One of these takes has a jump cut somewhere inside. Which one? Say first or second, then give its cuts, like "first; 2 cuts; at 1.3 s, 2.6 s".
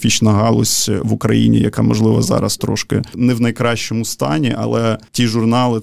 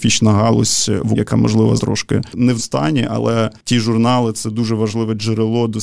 second; 3 cuts; at 1.1 s, 1.8 s, 2.6 s